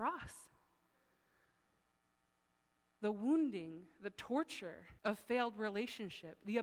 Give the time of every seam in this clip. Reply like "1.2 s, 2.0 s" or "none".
5.0 s